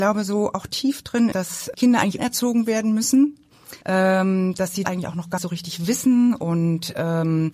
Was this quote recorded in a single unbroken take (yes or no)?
no